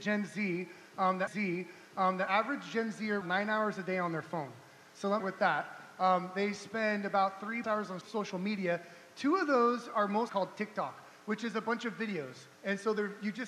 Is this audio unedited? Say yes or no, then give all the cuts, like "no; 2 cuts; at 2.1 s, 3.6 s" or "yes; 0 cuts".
no; 7 cuts; at 1.3 s, 3.2 s, 5.2 s, 7.6 s, 8.0 s, 10.3 s, 12.5 s